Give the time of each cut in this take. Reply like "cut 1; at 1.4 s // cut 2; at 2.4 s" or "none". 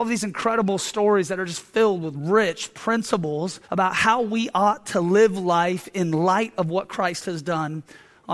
cut 1; at 3.6 s